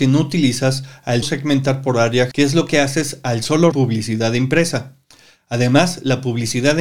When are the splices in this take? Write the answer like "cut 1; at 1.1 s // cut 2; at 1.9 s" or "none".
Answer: cut 1; at 1.2 s // cut 2; at 2.3 s // cut 3; at 3.7 s